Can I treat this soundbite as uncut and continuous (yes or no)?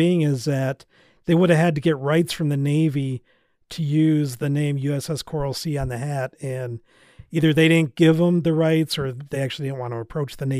yes